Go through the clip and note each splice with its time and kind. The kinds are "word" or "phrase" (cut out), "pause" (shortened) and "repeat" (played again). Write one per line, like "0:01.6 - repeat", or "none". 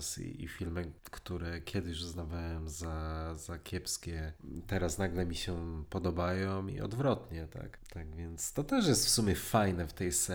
none